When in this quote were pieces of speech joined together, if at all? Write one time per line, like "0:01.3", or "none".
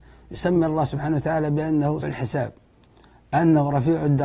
0:02.0